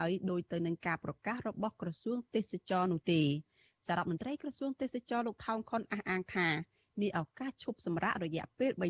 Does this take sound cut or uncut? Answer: uncut